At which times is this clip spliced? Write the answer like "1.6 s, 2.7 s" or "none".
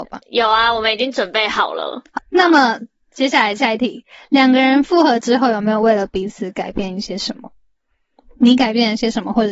2.2 s